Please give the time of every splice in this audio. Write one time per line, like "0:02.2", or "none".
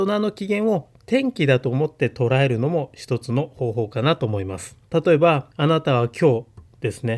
0:04.8
0:05.5